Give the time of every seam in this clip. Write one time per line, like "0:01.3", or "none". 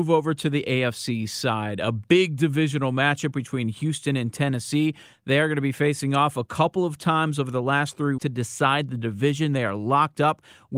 0:08.2